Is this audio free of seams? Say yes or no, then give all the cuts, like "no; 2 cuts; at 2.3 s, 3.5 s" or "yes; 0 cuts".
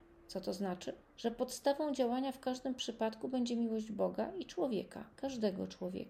no; 2 cuts; at 1.0 s, 5.1 s